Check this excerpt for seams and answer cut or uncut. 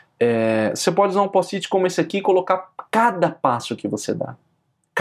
uncut